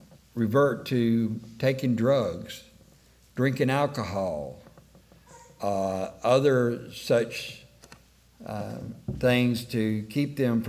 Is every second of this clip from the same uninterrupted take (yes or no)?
yes